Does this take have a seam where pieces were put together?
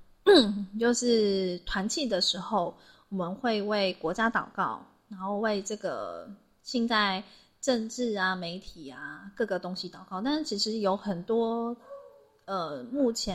no; 0 cuts

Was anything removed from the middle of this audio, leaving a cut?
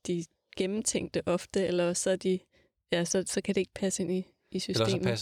no; 0 cuts

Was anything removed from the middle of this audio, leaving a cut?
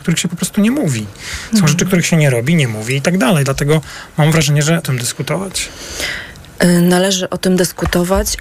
yes; 1 cut; at 4.8 s

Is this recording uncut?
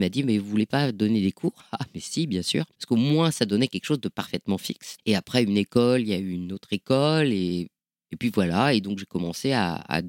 yes; 0 cuts

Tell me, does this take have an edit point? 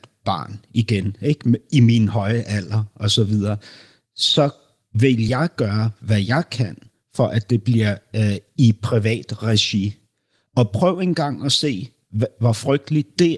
no; 0 cuts

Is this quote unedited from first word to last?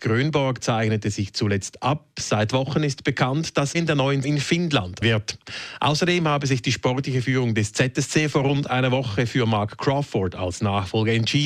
no; 3 cuts; at 3.7 s, 4.2 s, 5.0 s

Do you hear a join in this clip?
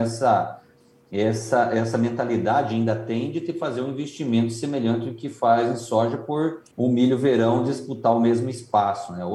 yes; 1 cut; at 6.7 s

